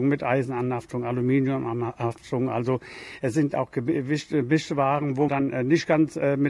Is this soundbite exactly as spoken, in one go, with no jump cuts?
no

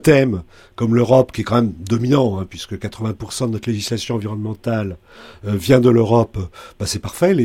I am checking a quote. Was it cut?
no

